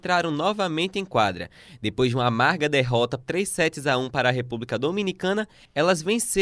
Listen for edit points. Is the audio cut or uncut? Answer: cut